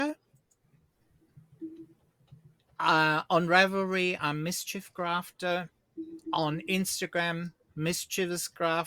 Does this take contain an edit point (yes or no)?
no